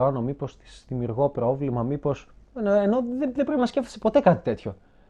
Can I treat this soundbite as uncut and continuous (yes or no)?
yes